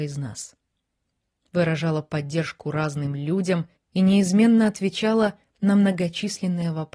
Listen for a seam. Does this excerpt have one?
yes; 1 cut; at 3.8 s

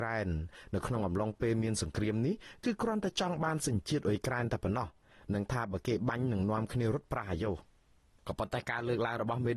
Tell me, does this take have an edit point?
no; 0 cuts

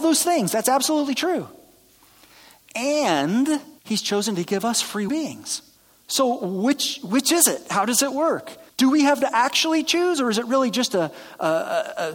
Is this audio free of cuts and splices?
no; 5 cuts; at 3.8 s, 5.1 s, 5.8 s, 8.7 s, 9.2 s

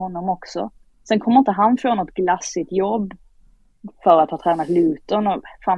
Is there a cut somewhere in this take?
no; 0 cuts

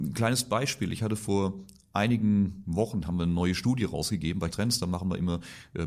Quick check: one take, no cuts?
no; 1 cut; at 4.5 s

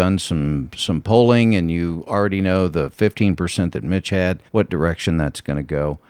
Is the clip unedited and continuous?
no; 1 cut; at 4.5 s

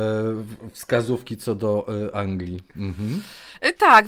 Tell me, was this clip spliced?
no; 0 cuts

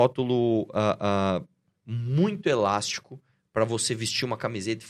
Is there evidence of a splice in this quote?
no; 0 cuts

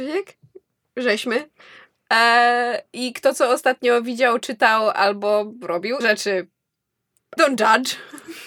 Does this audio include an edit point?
yes; 2 cuts; at 6.0 s, 7.4 s

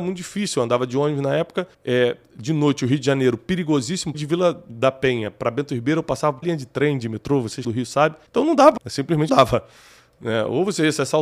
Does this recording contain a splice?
yes; 7 cuts; at 1.7 s, 4.1 s, 6.4 s, 7.6 s, 8.3 s, 8.8 s, 9.3 s

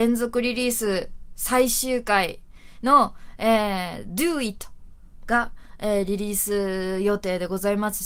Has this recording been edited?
no; 0 cuts

